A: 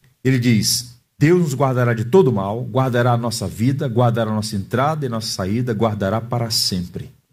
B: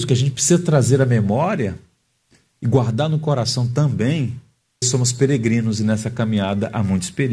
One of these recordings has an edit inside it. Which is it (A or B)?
B